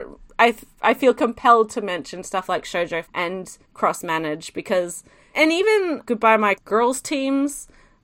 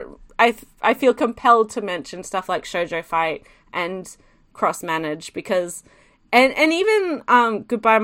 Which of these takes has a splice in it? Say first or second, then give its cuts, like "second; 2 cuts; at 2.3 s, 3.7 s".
first; 5 cuts; at 3.0 s, 3.6 s, 5.3 s, 6.0 s, 6.5 s